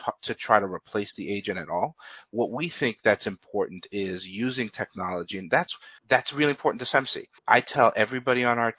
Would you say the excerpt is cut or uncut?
cut